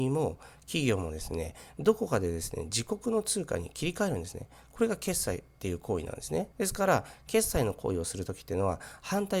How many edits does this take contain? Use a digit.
1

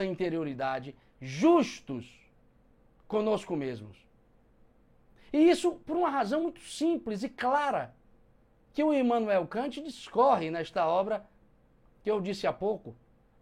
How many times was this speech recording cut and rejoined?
0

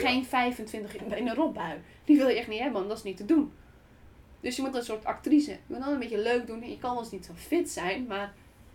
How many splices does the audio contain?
3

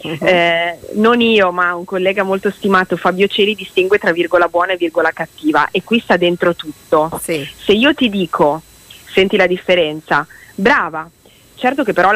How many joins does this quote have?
0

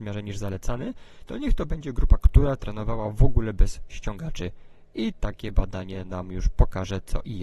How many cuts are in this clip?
1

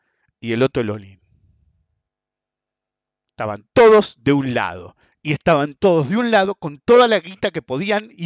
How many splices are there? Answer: 0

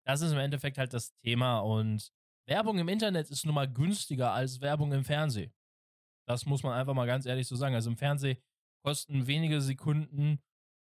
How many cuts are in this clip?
0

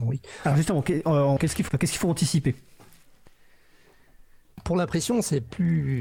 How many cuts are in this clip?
2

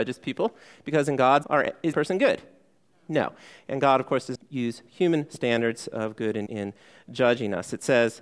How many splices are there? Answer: 4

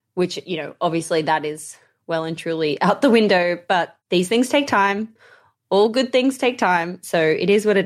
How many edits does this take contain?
1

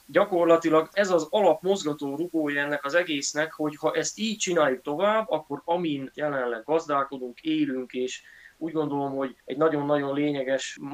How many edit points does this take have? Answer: 2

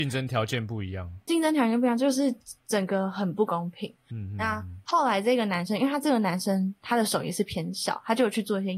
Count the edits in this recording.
1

